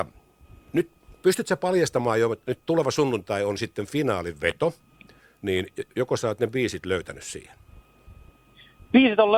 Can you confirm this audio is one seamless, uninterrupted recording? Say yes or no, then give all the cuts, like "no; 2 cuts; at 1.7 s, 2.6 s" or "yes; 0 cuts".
yes; 0 cuts